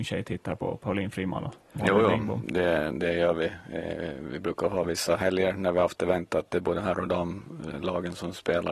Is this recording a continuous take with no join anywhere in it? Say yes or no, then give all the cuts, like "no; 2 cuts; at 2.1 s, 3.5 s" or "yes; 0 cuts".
yes; 0 cuts